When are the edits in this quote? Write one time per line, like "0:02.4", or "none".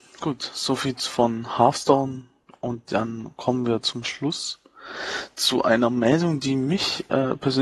none